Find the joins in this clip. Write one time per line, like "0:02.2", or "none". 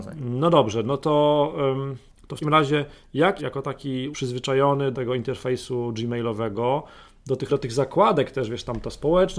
0:02.4
0:03.4
0:04.1
0:04.9
0:07.5